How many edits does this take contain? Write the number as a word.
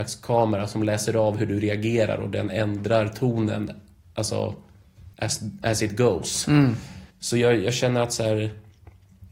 two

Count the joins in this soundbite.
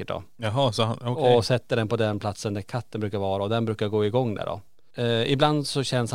zero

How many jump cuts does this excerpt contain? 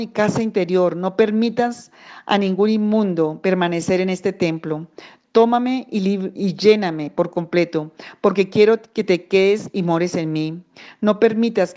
zero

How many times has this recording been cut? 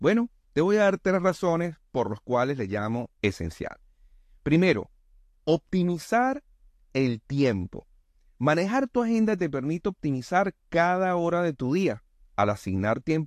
one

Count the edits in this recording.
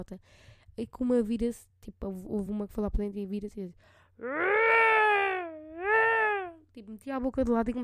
zero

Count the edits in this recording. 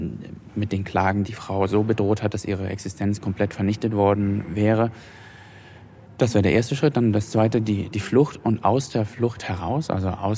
zero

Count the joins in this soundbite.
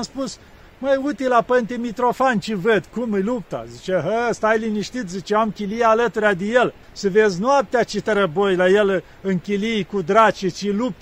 one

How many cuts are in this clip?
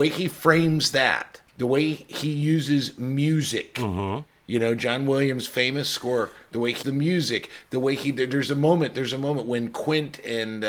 two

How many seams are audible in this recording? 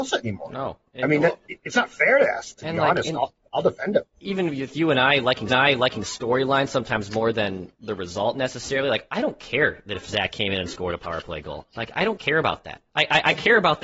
three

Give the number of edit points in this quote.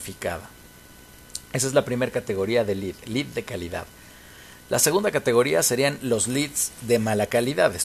zero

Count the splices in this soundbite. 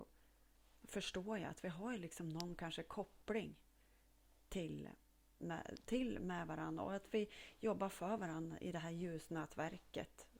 zero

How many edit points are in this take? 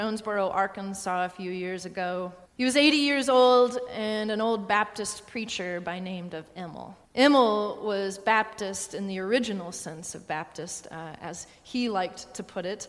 two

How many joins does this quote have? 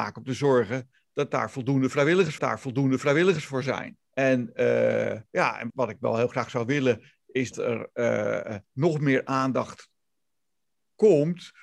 six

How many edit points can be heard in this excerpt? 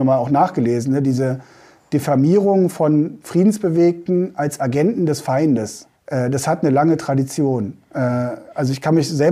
one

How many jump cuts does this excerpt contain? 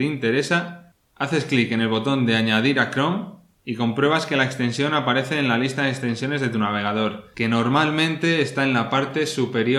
zero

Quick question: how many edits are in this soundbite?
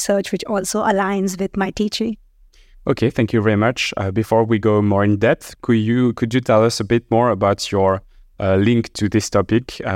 zero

